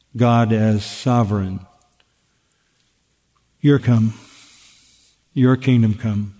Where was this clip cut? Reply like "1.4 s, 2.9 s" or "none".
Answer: 3.8 s